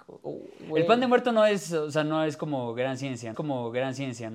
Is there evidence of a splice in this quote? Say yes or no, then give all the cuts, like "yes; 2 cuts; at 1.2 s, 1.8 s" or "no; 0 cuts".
yes; 1 cut; at 3.3 s